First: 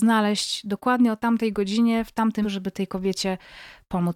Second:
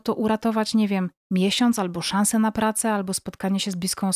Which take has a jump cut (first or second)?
first